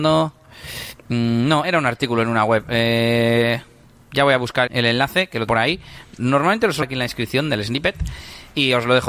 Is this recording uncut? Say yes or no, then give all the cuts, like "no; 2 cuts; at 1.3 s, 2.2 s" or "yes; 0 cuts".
no; 4 cuts; at 1.6 s, 4.7 s, 5.5 s, 6.8 s